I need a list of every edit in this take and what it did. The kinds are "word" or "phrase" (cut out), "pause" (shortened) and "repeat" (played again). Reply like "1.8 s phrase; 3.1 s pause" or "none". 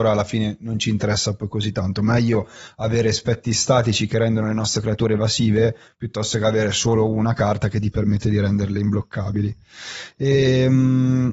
none